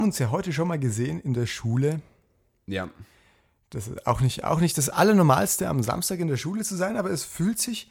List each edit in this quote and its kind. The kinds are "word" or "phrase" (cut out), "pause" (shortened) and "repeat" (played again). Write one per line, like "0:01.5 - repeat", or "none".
none